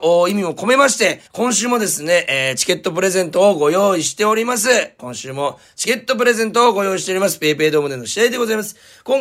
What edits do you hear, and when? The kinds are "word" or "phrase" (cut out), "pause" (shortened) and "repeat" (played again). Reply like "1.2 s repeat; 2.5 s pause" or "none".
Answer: 1.3 s pause